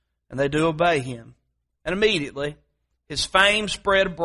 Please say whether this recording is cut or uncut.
uncut